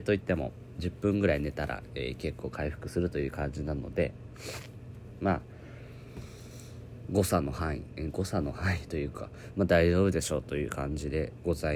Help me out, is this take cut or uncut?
uncut